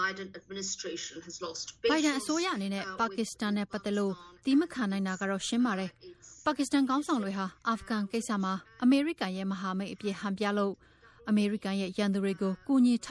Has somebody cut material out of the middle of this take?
no; 0 cuts

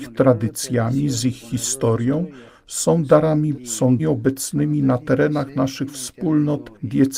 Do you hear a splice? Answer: yes; 2 cuts; at 3.5 s, 4.0 s

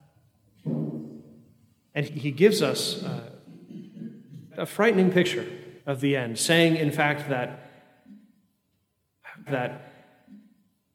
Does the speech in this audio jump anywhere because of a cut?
yes; 4 cuts; at 2.1 s, 4.5 s, 5.8 s, 9.5 s

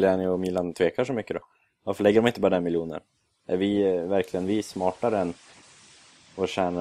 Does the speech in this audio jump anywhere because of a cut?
no; 0 cuts

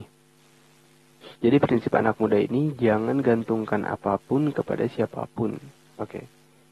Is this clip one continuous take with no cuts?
no; 1 cut; at 1.4 s

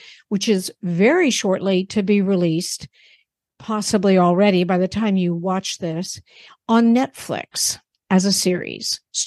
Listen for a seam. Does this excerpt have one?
no; 0 cuts

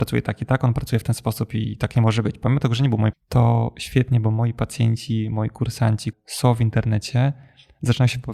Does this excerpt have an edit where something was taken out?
yes; 2 cuts; at 3.1 s, 6.1 s

